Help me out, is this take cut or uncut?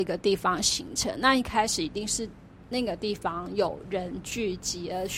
uncut